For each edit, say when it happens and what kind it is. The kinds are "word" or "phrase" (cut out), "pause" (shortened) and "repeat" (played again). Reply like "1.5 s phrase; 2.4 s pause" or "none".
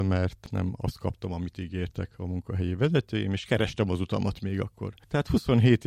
none